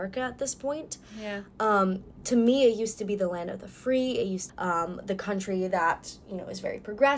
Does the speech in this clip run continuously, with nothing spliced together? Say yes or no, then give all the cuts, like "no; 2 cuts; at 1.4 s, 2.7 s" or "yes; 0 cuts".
no; 1 cut; at 4.5 s